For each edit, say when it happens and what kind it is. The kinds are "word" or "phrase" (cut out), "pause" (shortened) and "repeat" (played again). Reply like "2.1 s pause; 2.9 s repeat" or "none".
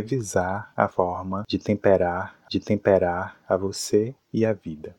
2.5 s repeat